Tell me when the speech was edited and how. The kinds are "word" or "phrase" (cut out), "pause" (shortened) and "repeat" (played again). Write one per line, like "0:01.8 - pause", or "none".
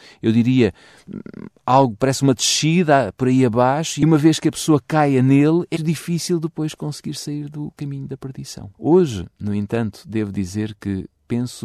0:05.7 - word
0:08.7 - pause